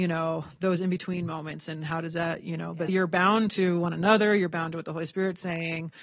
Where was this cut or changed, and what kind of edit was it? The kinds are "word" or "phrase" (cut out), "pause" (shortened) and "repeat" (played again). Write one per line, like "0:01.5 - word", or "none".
0:02.9 - word